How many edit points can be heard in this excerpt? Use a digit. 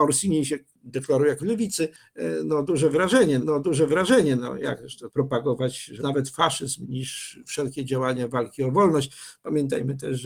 5